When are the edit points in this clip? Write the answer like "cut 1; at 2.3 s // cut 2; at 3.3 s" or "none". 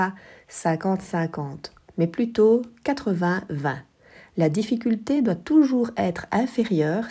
none